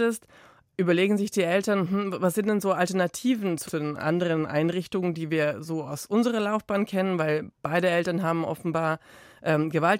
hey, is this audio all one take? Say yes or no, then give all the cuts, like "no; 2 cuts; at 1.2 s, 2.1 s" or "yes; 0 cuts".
no; 1 cut; at 3.6 s